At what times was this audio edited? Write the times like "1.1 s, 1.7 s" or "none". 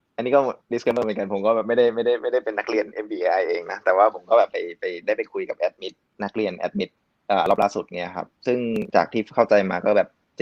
none